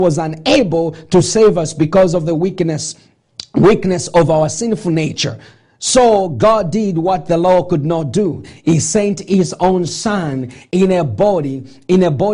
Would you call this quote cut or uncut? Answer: uncut